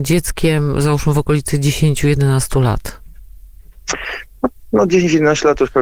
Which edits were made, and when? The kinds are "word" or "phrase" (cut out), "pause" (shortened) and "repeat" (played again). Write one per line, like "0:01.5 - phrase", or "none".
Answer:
none